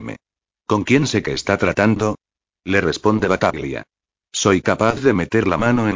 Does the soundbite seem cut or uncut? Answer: cut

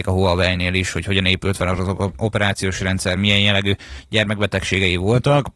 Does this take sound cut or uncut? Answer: uncut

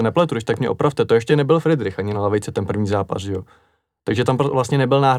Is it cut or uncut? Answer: uncut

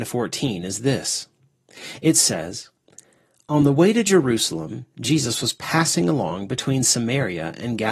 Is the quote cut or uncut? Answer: uncut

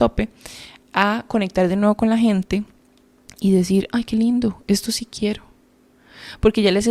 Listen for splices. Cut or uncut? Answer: uncut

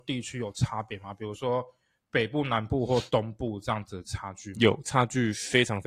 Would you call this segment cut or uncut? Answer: uncut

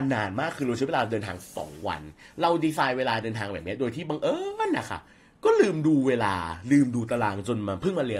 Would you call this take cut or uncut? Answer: uncut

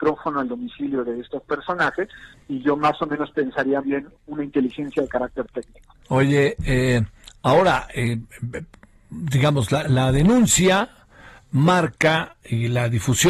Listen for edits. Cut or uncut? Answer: cut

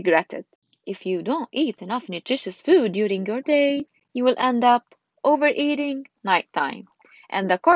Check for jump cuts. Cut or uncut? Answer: uncut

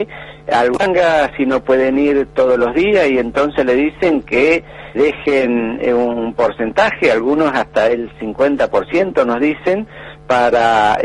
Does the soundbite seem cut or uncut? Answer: cut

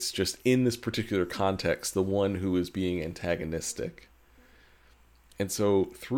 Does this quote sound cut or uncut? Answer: uncut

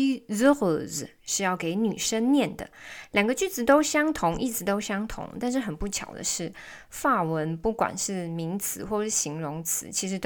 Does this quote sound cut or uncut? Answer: uncut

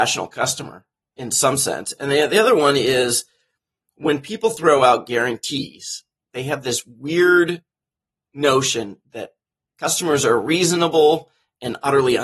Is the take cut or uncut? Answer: uncut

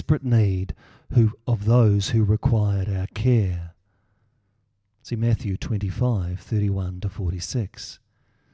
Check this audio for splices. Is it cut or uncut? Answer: uncut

